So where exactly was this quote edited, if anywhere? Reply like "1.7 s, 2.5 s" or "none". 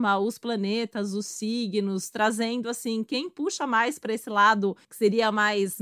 4.8 s